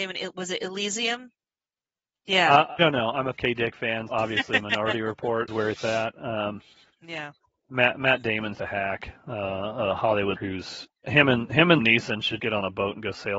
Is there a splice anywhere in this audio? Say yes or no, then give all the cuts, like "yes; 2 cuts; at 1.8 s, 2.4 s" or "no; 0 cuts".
yes; 9 cuts; at 2.8 s, 3.4 s, 4.1 s, 5.5 s, 8.5 s, 10.4 s, 11.0 s, 11.8 s, 12.4 s